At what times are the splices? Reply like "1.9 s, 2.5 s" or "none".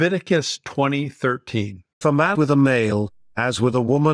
2.0 s, 2.3 s